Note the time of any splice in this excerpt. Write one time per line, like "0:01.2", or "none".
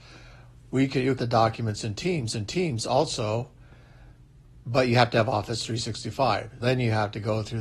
0:01.2
0:02.3
0:06.6

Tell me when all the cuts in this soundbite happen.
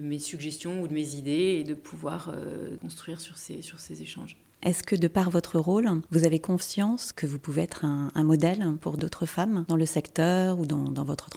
none

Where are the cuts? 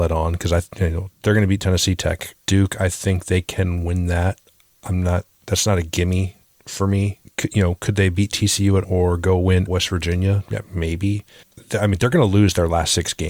0:02.4
0:08.8
0:09.7

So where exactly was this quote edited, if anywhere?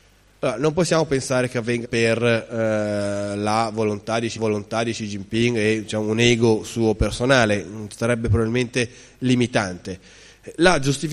0:01.8
0:04.4

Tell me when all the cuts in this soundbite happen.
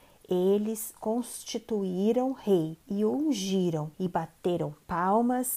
0:01.0
0:02.8
0:03.9

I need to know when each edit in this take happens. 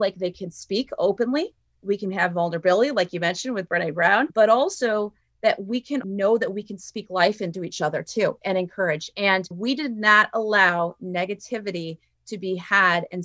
none

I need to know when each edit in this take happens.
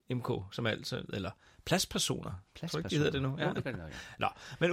none

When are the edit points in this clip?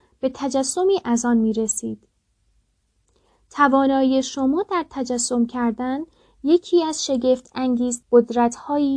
0:08.0

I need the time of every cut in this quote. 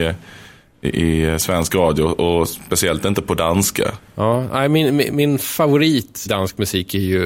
0:05.1
0:06.3

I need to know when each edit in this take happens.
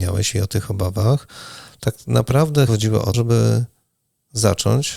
0:02.7
0:03.1

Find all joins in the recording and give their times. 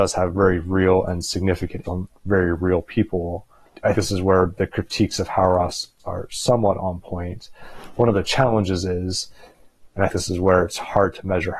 0:01.8
0:03.9
0:06.0
0:10.1

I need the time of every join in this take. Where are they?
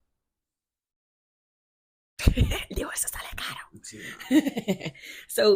none

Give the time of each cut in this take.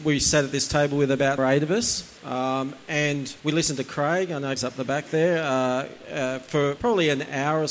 0:01.4
0:02.2
0:03.4
0:04.6
0:06.8

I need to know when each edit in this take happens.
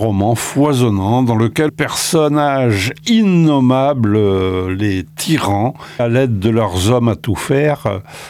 0:01.7
0:06.0

